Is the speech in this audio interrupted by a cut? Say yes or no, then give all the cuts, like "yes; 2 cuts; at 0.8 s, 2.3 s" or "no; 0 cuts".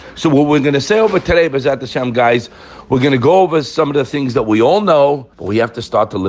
yes; 1 cut; at 5.3 s